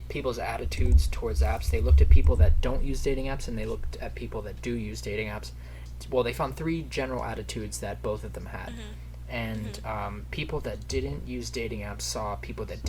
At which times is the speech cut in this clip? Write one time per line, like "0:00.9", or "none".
none